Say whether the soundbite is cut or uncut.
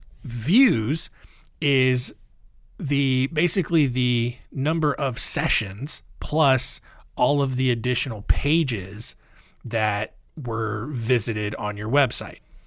uncut